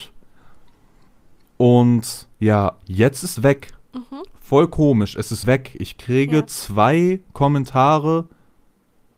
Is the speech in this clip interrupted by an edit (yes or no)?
yes